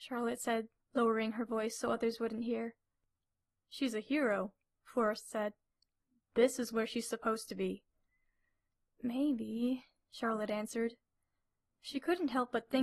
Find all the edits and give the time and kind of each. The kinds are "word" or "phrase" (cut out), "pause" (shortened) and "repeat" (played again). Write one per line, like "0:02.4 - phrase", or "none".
none